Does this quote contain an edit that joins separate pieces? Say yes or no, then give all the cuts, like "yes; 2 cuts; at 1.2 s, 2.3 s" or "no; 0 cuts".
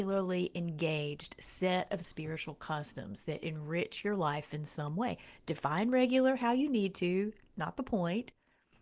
no; 0 cuts